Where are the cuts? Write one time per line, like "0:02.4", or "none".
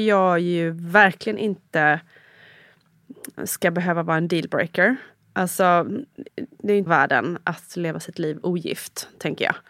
0:03.4
0:06.3
0:06.9